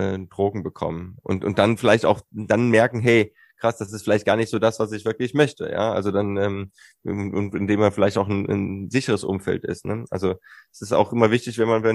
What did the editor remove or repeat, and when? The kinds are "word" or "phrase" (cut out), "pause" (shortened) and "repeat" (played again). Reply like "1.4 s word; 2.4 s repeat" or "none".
none